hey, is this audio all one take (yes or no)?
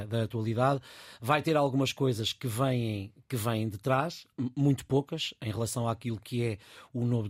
yes